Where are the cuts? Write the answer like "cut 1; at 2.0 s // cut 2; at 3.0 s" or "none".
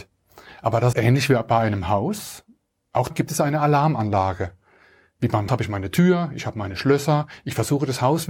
cut 1; at 0.9 s // cut 2; at 3.1 s // cut 3; at 5.5 s